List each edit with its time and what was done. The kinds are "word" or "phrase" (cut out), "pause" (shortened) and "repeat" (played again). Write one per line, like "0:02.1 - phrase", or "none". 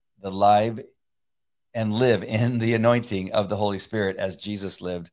none